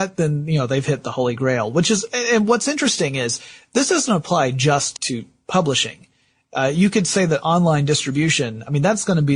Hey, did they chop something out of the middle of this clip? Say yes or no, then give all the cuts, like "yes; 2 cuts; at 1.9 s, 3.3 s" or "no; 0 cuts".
yes; 1 cut; at 5.0 s